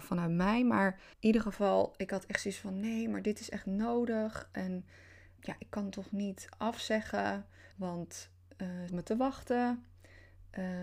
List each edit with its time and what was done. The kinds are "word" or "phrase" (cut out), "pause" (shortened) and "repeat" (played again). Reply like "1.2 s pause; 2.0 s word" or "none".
1.1 s pause; 5.4 s word; 7.7 s pause; 8.9 s phrase